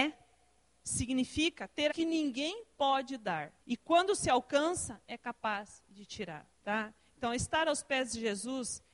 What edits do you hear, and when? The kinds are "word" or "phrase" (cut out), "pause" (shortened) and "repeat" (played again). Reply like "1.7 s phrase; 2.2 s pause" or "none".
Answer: 1.9 s word; 3.6 s pause; 5.0 s word; 6.5 s pause